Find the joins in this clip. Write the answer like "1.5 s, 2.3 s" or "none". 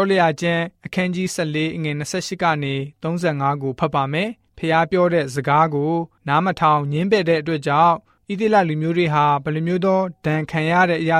none